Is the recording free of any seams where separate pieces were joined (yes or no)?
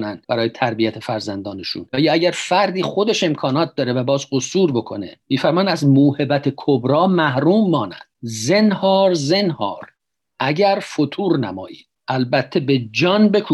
yes